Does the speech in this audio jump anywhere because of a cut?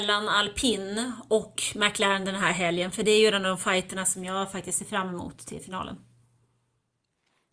no; 0 cuts

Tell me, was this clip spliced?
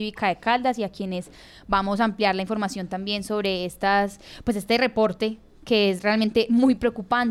no; 0 cuts

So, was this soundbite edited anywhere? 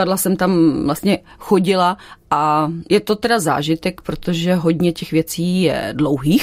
no; 0 cuts

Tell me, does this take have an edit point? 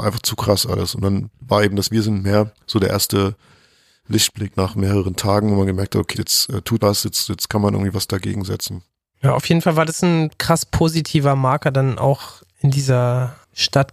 yes; 2 cuts; at 6.1 s, 6.8 s

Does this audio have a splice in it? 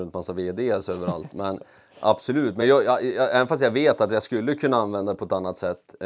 no; 0 cuts

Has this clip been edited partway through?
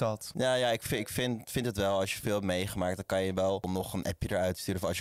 no; 0 cuts

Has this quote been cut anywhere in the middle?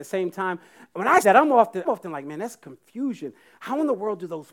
yes; 2 cuts; at 1.2 s, 1.8 s

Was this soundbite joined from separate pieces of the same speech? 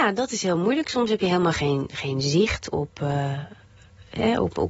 no; 0 cuts

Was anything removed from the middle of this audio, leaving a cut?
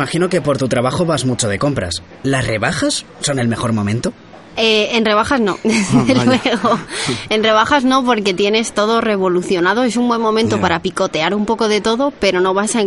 no; 0 cuts

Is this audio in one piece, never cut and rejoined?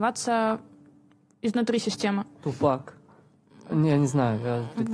yes; 0 cuts

